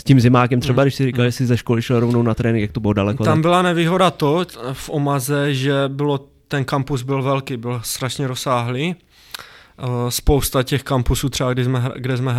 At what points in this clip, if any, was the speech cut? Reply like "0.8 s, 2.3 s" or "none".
none